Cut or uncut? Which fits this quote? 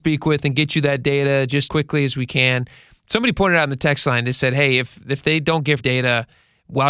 cut